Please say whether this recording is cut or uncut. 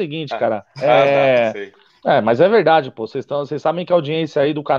cut